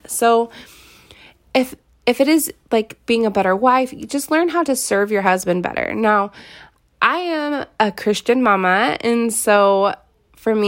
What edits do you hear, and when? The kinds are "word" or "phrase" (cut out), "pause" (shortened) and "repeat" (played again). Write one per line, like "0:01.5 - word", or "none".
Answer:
none